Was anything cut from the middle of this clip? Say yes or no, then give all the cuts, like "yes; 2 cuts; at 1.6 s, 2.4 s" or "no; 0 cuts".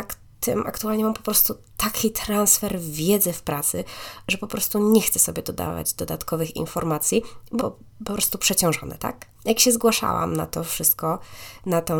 yes; 2 cuts; at 7.6 s, 9.3 s